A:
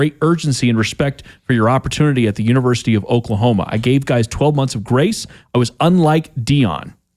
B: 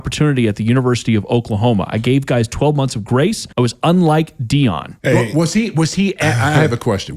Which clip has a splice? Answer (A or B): B